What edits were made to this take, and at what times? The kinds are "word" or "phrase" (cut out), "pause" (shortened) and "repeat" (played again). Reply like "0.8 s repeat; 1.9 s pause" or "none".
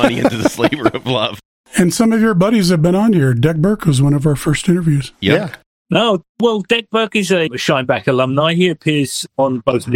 none